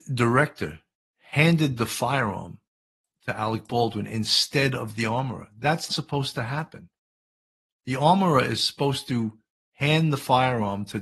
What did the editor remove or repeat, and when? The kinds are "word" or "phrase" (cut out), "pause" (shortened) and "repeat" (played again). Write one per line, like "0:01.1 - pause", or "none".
0:05.9 - word